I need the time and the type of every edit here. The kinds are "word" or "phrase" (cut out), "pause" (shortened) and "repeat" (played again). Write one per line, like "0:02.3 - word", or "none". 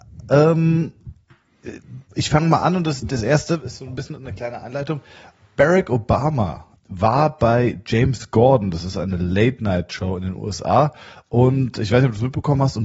0:02.0 - pause
0:06.8 - word